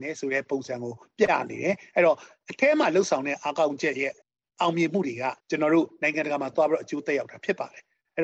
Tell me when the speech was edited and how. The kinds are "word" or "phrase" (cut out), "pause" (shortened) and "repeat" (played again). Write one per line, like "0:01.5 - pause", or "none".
0:04.2 - pause
0:05.4 - pause

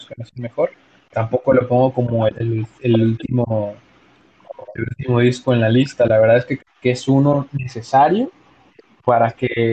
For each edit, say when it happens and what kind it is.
0:01.1 - word
0:02.3 - word
0:06.6 - word

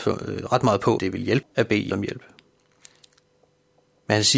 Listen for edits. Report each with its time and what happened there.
0:01.0 - word
0:01.4 - word
0:01.9 - word

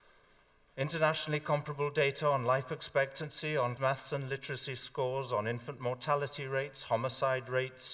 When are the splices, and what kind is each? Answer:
0:03.8 - word

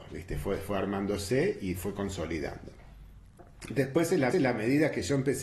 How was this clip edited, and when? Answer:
0:01.8 - word
0:04.3 - repeat

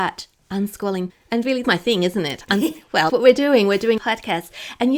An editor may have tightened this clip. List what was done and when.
0:01.1 - word
0:01.6 - word
0:03.1 - word
0:04.0 - word

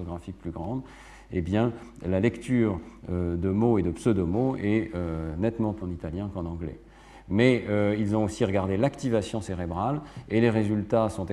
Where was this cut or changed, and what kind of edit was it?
0:05.8 - phrase

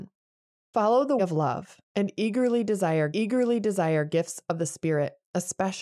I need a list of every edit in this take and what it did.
0:01.2 - word
0:01.8 - pause
0:03.1 - repeat

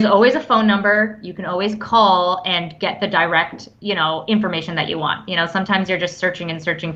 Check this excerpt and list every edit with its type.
none

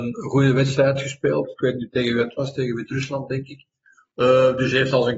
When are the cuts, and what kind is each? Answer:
none

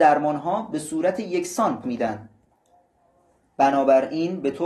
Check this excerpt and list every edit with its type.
0:01.8 - word

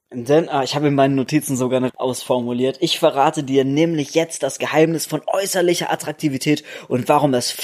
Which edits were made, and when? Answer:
0:01.9 - phrase

